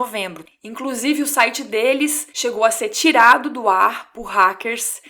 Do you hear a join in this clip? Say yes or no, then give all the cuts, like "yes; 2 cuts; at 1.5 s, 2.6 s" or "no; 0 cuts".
yes; 1 cut; at 2.3 s